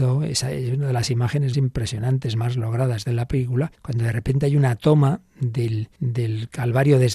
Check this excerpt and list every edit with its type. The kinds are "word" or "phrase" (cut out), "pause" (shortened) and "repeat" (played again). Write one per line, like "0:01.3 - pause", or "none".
0:01.5 - word
0:03.7 - pause
0:05.9 - pause